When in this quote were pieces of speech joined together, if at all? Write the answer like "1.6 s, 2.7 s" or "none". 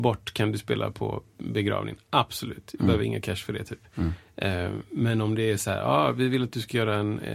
none